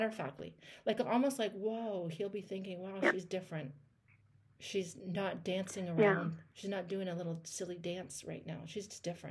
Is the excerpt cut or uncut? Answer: cut